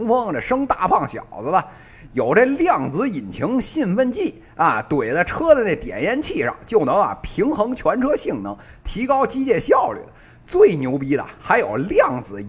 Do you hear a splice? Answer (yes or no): no